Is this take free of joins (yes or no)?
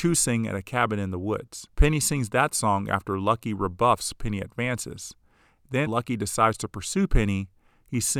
no